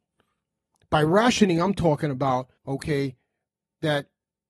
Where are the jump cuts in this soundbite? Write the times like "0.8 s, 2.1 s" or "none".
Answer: 2.6 s